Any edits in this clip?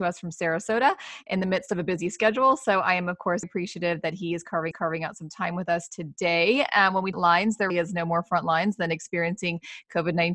yes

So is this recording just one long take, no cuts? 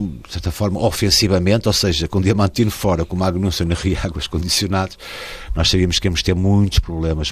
yes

